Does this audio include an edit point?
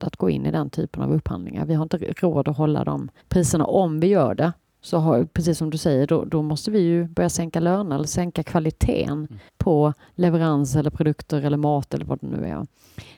yes; 2 cuts; at 3.2 s, 9.5 s

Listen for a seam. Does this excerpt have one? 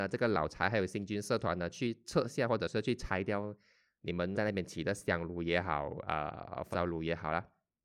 yes; 2 cuts; at 4.3 s, 6.7 s

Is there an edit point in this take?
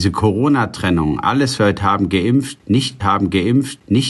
yes; 2 cuts; at 1.6 s, 3.0 s

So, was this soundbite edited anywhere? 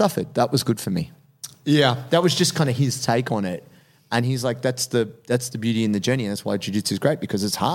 no; 0 cuts

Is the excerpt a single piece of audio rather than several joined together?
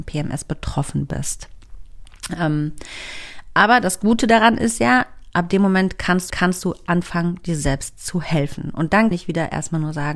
no; 2 cuts; at 6.3 s, 9.1 s

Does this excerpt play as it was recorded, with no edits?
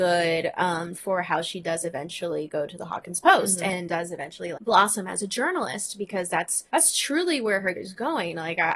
no; 4 cuts; at 0.9 s, 4.5 s, 6.7 s, 7.7 s

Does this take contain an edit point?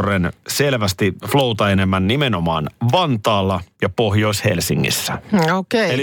yes; 1 cut; at 3.7 s

